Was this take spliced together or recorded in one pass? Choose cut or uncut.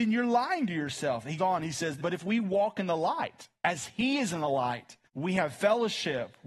cut